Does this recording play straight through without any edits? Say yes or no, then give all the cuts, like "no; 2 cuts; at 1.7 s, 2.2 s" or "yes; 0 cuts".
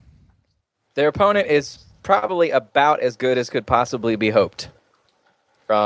yes; 0 cuts